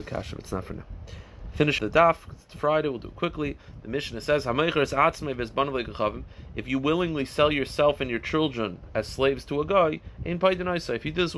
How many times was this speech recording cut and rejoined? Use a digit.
1